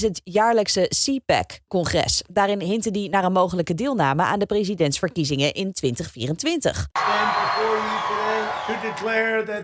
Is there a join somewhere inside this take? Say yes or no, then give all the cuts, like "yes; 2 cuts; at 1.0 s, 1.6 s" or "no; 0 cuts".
no; 0 cuts